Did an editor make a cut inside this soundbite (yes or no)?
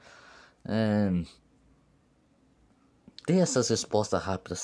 no